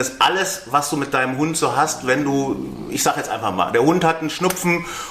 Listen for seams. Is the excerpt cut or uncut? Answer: uncut